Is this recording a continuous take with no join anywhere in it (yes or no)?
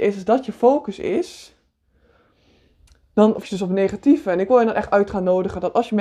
no